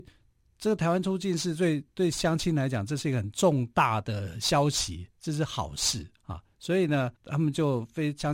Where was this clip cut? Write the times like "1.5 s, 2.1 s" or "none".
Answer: 6.2 s, 7.2 s